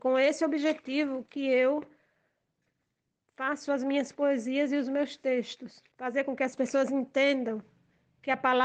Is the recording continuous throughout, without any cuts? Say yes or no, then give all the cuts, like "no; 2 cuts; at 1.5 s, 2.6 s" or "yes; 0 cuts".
no; 1 cut; at 5.9 s